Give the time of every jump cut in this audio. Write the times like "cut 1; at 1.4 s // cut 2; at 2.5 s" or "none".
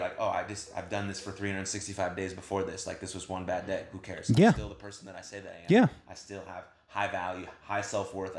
none